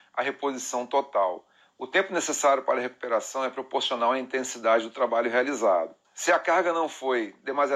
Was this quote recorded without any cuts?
yes; 0 cuts

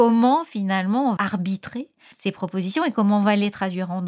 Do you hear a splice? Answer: yes; 2 cuts; at 1.2 s, 2.1 s

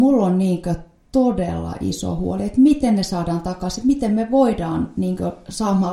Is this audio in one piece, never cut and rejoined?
yes; 0 cuts

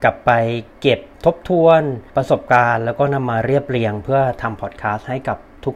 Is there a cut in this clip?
yes; 2 cuts; at 1.1 s, 2.1 s

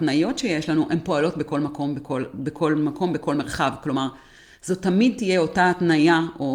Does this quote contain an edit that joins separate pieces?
no; 0 cuts

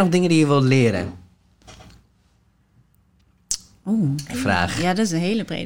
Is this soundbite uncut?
no; 1 cut; at 4.3 s

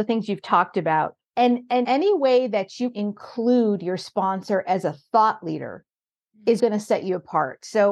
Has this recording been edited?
yes; 4 cuts; at 1.2 s, 1.8 s, 2.9 s, 6.6 s

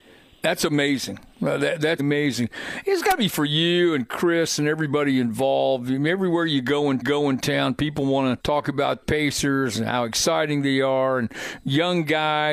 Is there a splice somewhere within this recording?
yes; 5 cuts; at 2.0 s, 3.3 s, 7.0 s, 8.4 s, 9.0 s

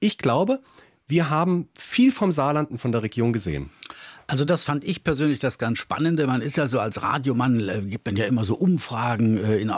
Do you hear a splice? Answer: no; 0 cuts

